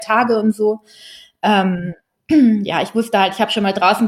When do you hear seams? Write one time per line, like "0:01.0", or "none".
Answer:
none